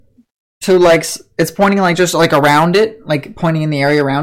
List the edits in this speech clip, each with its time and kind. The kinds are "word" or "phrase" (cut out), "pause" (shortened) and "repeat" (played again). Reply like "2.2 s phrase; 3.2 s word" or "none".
none